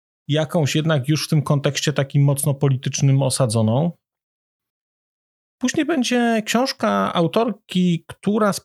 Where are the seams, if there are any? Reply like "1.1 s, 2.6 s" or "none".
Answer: none